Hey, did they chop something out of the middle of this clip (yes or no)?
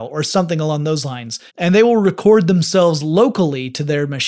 yes